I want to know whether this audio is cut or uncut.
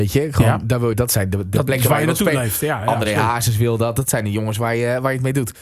cut